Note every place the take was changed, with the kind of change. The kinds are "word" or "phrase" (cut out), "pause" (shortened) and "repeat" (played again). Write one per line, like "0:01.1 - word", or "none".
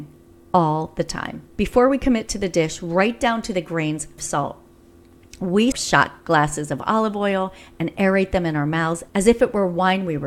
0:04.2 - word
0:05.7 - word